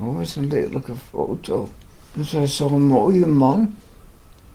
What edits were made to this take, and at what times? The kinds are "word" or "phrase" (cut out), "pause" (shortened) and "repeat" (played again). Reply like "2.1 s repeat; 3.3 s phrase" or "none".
1.9 s pause